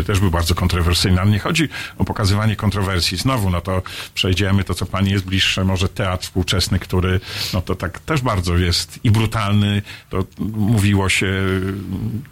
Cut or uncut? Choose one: uncut